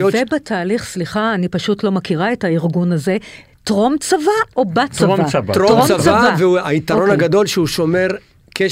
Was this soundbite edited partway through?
no; 0 cuts

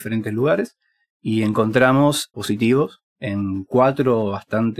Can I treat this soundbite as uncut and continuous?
no; 2 cuts; at 2.3 s, 3.1 s

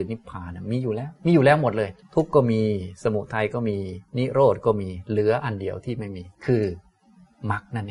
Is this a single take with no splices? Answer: no; 4 cuts; at 1.2 s, 2.0 s, 4.1 s, 6.3 s

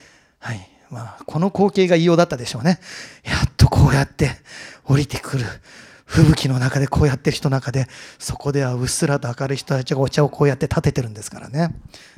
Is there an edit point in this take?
no; 0 cuts

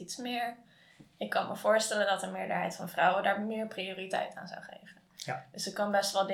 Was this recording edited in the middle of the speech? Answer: no; 0 cuts

